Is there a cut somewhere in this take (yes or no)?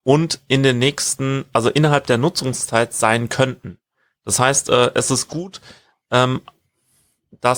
no